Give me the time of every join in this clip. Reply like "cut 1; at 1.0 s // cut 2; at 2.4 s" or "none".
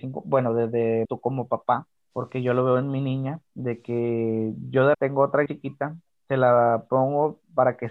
cut 1; at 1.0 s // cut 2; at 2.0 s // cut 3; at 3.5 s // cut 4; at 4.9 s // cut 5; at 5.5 s